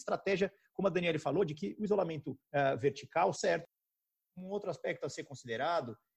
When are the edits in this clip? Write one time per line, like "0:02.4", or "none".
0:03.3